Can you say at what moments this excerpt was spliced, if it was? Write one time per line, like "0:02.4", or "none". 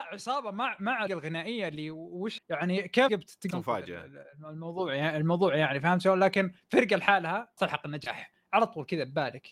0:01.1
0:02.4
0:03.1
0:03.5
0:07.6

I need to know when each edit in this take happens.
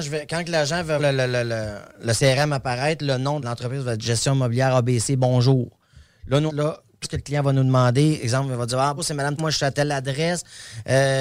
0:01.0
0:03.4
0:06.5
0:07.0
0:09.0
0:09.4

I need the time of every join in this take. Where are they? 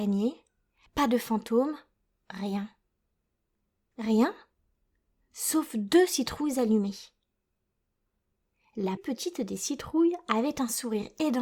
0:09.0

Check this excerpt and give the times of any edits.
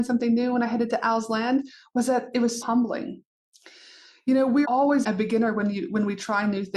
0:02.6
0:04.6
0:05.0

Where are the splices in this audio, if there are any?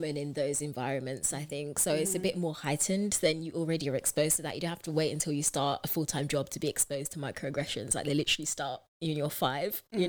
0:08.9

